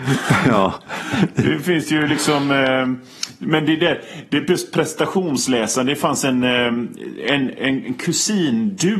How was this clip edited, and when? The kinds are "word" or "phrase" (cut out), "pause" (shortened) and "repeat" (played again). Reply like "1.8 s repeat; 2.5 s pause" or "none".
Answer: none